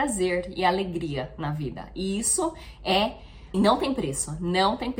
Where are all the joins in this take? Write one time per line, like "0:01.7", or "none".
0:03.5